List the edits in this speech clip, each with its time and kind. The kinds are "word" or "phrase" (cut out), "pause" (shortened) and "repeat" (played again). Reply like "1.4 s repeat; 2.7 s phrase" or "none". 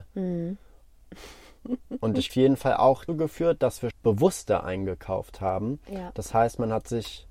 2.3 s phrase; 3.1 s word; 3.9 s word